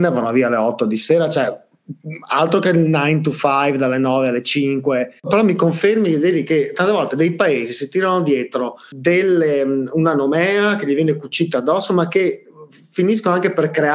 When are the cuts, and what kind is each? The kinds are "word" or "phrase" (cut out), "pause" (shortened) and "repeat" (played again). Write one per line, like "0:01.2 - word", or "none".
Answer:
0:05.2 - pause